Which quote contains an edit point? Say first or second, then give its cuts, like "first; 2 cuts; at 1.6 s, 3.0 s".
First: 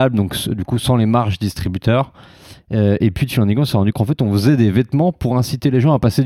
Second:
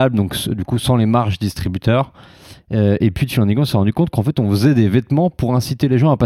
first; 1 cut; at 3.9 s